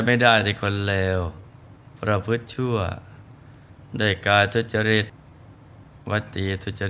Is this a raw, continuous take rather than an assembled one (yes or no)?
yes